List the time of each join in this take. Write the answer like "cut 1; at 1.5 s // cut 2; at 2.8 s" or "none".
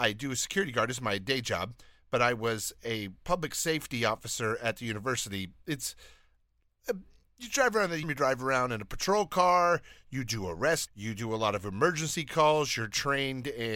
cut 1; at 8.0 s // cut 2; at 10.9 s